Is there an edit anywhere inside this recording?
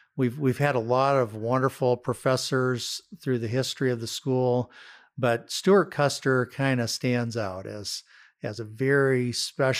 no; 0 cuts

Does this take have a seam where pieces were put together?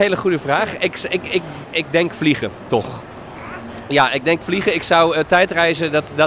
yes; 2 cuts; at 1.6 s, 4.4 s

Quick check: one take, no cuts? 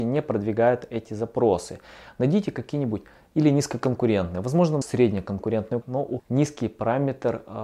no; 3 cuts; at 4.8 s, 5.8 s, 6.2 s

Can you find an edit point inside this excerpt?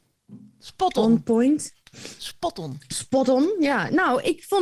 no; 0 cuts

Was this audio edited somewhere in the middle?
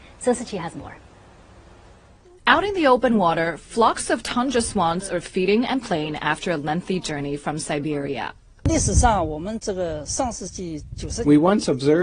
no; 0 cuts

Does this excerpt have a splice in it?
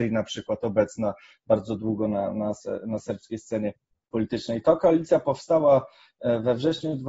no; 0 cuts

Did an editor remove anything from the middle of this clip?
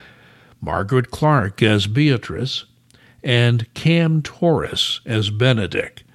no; 0 cuts

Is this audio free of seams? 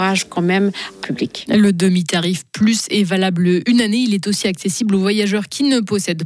no; 1 cut; at 1.0 s

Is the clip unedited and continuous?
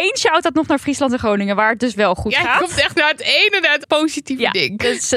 no; 1 cut; at 3.8 s

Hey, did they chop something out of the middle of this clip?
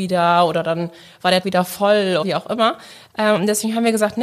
yes; 2 cuts; at 1.4 s, 2.2 s

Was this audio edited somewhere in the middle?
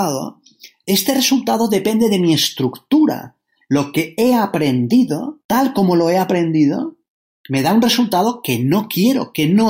no; 0 cuts

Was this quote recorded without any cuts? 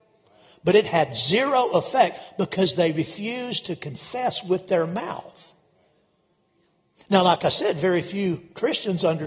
yes; 0 cuts

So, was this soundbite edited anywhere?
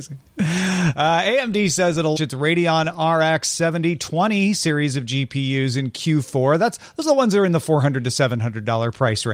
yes; 1 cut; at 2.2 s

